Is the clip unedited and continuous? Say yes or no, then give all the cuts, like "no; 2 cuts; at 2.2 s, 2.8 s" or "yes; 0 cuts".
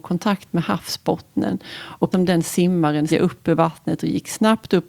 no; 2 cuts; at 2.1 s, 3.1 s